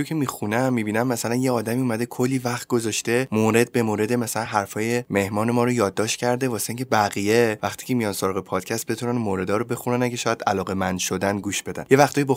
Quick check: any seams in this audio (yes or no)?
no